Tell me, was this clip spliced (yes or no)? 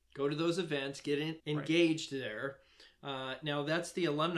yes